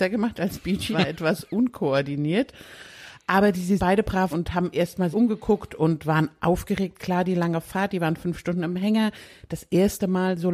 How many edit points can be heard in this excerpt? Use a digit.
4